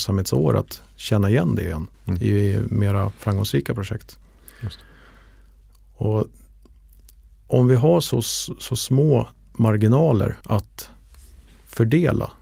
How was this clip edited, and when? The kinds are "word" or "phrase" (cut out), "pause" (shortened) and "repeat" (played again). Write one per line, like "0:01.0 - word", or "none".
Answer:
0:01.9 - pause
0:10.4 - pause